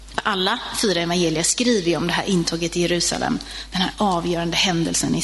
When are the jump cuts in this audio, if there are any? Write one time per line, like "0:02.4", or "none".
none